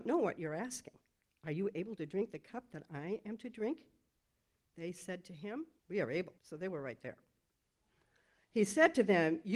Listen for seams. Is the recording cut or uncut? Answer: cut